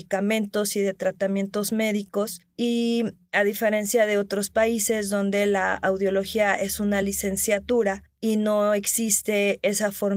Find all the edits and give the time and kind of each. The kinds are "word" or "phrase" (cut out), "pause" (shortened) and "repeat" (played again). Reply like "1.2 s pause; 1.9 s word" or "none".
none